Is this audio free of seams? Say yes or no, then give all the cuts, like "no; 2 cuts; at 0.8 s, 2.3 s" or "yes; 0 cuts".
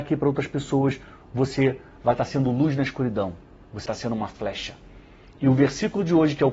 no; 1 cut; at 3.9 s